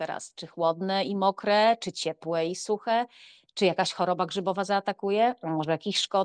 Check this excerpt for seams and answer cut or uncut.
uncut